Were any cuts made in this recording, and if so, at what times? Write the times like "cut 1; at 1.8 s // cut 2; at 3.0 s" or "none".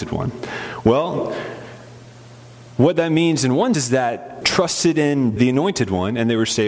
cut 1; at 3.7 s // cut 2; at 4.4 s // cut 3; at 5.4 s